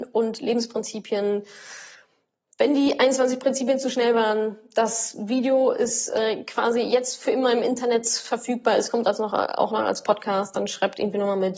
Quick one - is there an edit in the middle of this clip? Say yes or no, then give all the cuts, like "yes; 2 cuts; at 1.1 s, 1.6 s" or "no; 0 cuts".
no; 0 cuts